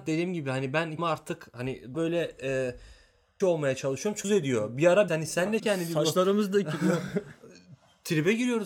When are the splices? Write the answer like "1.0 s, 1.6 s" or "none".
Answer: 1.0 s, 1.9 s, 3.4 s, 4.2 s, 5.1 s, 5.6 s